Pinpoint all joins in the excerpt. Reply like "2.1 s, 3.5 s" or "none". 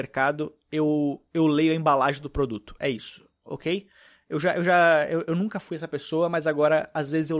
none